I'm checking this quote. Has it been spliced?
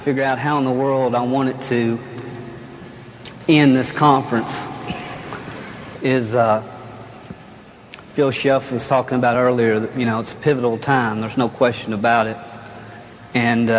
no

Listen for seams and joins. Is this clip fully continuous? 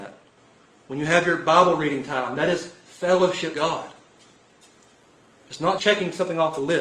no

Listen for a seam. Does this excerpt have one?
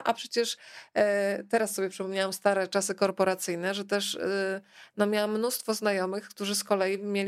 no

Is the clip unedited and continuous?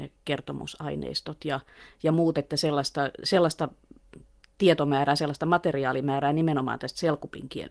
yes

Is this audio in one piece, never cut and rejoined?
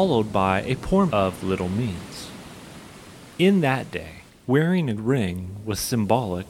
no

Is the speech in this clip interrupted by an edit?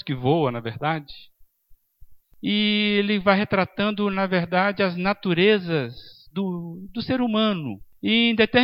no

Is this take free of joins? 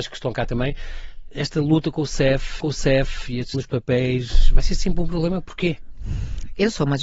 no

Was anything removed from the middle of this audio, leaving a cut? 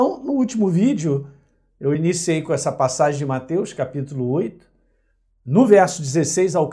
no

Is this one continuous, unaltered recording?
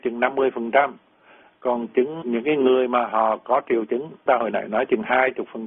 no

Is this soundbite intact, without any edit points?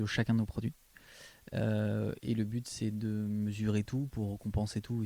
yes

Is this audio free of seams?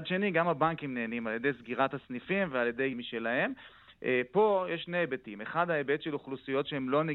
no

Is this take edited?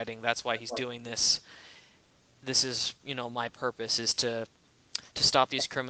no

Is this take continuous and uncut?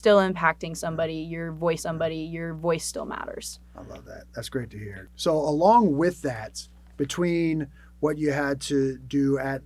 no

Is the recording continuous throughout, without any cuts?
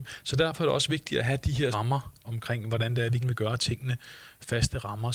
no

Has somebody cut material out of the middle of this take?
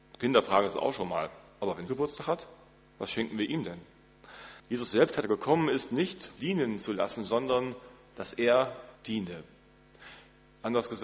yes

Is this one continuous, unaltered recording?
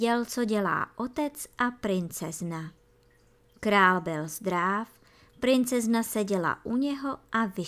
yes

